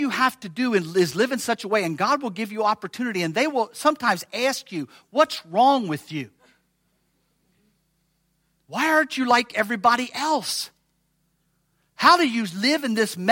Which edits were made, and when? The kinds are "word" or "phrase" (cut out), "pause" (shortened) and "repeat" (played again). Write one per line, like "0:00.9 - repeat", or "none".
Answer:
none